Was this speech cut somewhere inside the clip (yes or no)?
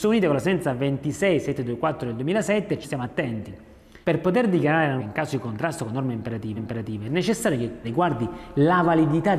yes